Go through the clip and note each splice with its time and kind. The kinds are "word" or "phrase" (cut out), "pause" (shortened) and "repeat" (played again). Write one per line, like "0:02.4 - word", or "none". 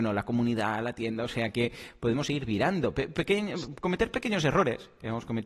none